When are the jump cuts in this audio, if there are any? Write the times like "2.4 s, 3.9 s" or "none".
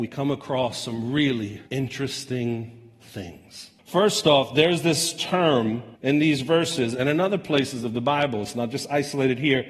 1.7 s, 3.8 s, 6.0 s